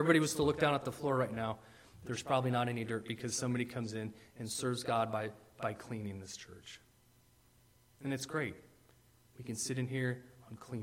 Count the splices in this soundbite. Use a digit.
0